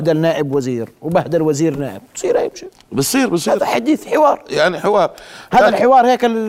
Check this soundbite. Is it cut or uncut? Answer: uncut